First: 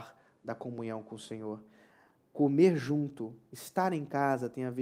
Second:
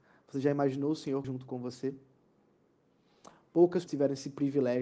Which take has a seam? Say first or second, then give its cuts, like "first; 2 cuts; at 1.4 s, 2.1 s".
second; 2 cuts; at 1.2 s, 3.9 s